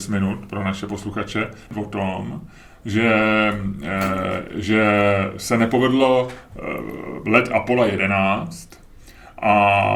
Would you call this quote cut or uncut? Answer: uncut